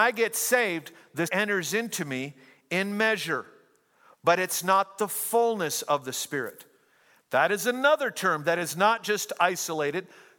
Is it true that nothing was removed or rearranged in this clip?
no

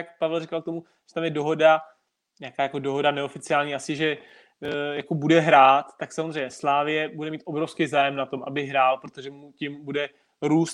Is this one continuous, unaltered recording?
yes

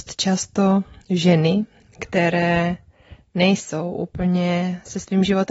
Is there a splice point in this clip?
no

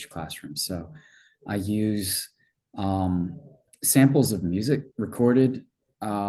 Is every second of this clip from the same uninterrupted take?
no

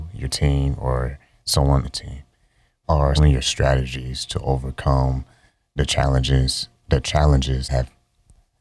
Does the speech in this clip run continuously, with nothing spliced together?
no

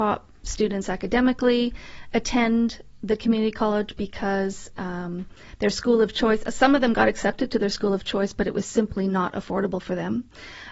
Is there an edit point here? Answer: no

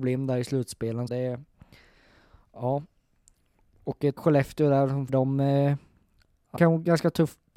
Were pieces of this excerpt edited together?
yes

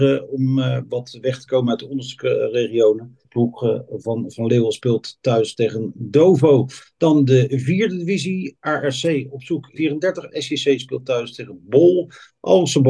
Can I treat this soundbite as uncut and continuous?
no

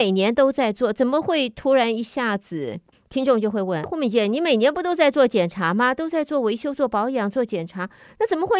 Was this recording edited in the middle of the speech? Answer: yes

